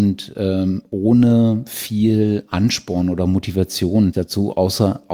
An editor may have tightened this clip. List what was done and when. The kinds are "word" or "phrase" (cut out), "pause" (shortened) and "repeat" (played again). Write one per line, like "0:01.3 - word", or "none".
0:04.1 - word